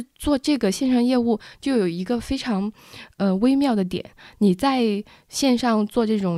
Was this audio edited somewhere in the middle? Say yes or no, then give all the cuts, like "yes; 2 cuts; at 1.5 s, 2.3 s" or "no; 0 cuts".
no; 0 cuts